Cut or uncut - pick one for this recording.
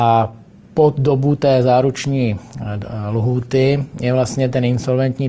uncut